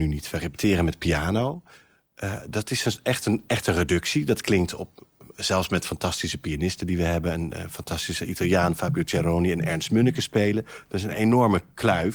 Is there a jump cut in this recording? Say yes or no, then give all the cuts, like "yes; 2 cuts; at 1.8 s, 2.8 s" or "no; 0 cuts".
no; 0 cuts